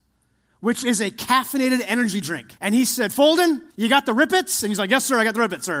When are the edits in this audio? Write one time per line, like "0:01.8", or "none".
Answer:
0:02.6
0:03.7